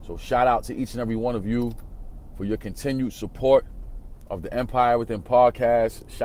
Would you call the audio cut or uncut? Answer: uncut